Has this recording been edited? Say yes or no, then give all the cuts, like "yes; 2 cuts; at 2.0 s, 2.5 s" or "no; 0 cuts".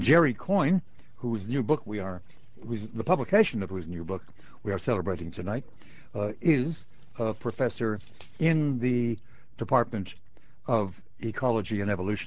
no; 0 cuts